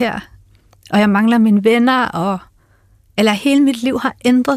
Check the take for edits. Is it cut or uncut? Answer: uncut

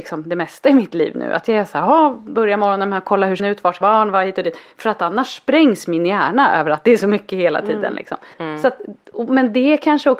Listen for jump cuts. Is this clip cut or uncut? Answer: cut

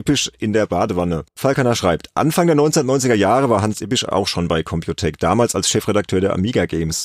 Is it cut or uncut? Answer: cut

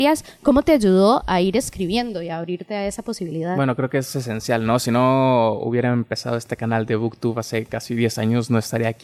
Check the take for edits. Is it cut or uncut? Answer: uncut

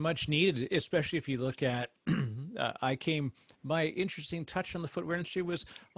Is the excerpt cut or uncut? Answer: uncut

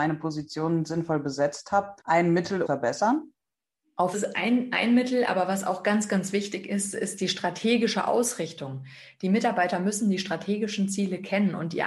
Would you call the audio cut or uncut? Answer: cut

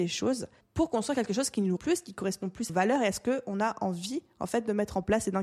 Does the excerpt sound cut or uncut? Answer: cut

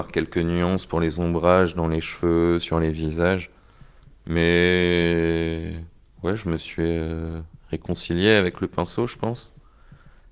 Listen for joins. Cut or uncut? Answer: uncut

